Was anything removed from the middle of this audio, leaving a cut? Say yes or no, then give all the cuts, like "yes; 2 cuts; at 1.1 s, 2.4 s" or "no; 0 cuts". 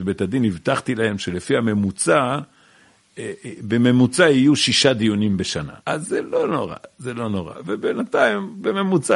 yes; 1 cut; at 5.8 s